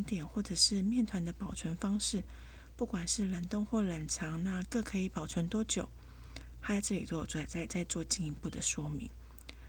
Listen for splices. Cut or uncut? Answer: uncut